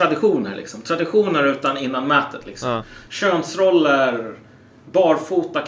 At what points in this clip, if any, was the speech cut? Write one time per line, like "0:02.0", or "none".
none